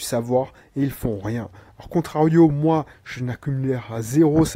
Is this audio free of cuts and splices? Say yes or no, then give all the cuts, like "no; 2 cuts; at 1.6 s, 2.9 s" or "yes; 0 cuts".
yes; 0 cuts